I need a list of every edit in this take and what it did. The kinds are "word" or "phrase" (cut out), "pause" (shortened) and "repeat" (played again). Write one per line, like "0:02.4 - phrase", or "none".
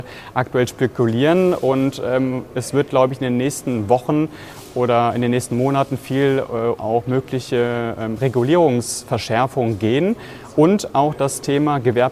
0:06.8 - word